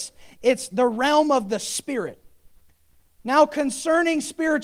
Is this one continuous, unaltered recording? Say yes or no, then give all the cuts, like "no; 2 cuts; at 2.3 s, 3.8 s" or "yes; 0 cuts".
yes; 0 cuts